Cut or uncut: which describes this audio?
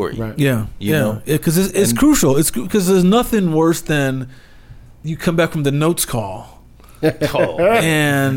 uncut